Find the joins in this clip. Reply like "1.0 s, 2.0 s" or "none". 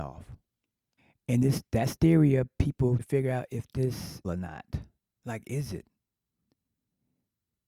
1.0 s, 2.0 s, 3.0 s, 4.2 s, 5.0 s